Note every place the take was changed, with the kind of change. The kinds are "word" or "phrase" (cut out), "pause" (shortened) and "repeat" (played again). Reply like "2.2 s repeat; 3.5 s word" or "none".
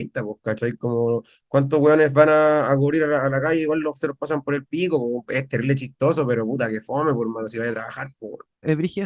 none